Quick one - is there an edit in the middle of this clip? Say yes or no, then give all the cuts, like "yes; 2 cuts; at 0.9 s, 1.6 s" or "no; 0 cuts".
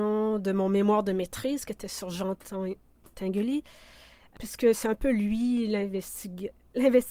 no; 0 cuts